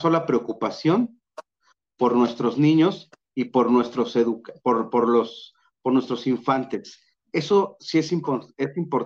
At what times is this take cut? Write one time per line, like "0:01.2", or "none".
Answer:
none